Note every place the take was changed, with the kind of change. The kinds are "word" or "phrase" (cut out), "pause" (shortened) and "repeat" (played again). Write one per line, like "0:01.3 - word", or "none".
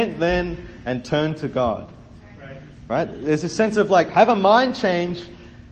none